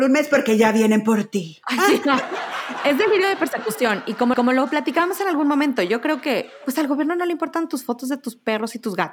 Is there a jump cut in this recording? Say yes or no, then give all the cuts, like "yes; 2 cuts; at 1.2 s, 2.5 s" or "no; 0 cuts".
yes; 1 cut; at 4.3 s